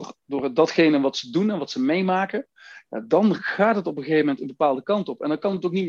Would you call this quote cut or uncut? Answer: uncut